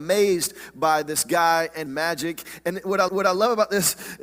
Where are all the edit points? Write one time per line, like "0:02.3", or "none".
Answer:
0:01.0
0:01.9
0:03.1

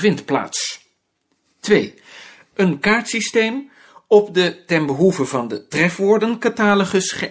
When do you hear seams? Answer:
none

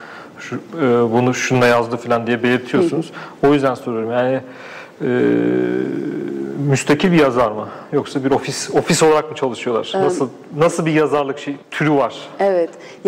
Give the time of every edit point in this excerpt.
0:11.6

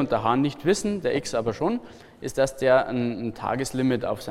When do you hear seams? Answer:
none

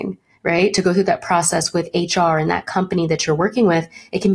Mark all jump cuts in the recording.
none

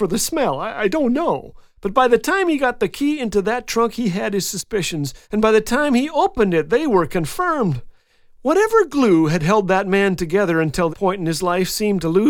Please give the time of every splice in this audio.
0:05.2
0:10.9

